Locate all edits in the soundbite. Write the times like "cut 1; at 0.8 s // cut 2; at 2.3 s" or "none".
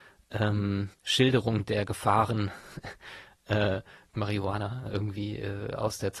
cut 1; at 0.9 s // cut 2; at 4.1 s